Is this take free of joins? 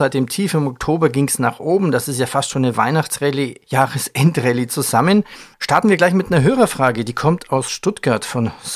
yes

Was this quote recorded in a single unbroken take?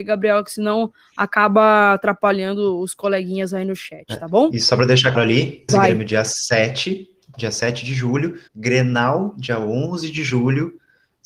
no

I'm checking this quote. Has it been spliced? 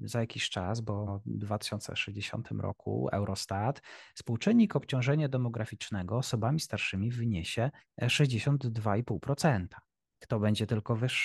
yes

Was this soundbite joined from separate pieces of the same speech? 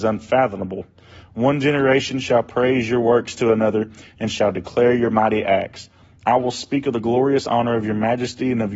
no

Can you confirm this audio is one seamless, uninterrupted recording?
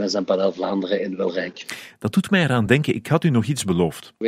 yes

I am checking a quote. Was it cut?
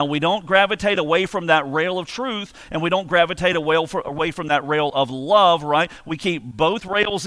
no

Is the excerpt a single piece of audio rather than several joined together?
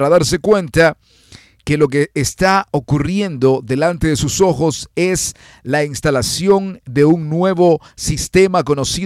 yes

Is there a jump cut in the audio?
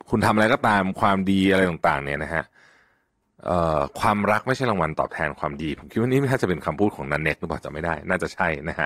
no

